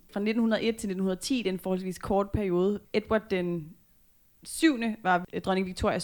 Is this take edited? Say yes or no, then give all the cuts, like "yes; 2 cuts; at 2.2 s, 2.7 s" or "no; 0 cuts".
no; 0 cuts